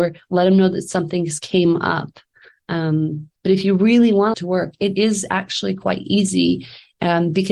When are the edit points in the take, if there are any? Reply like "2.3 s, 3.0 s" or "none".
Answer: 3.4 s, 4.3 s